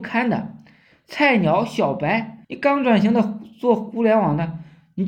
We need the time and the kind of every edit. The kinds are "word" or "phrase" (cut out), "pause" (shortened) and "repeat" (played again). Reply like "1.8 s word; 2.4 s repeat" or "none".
2.4 s pause